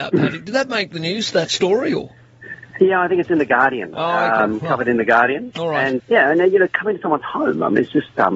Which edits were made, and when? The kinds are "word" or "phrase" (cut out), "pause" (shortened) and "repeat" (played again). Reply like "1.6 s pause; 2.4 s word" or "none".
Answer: 6.0 s word